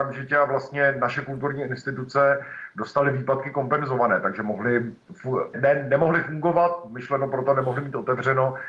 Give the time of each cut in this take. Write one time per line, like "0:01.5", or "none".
0:05.5